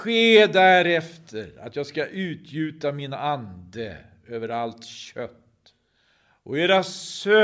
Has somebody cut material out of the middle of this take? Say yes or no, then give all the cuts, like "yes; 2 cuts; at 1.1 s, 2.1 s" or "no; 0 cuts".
no; 0 cuts